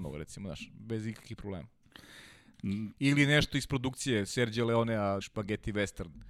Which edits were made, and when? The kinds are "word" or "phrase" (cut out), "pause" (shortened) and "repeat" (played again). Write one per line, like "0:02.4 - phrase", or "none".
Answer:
0:05.2 - word